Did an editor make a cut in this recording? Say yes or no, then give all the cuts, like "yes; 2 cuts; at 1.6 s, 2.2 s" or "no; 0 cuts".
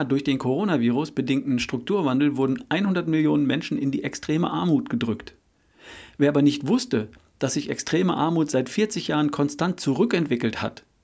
no; 0 cuts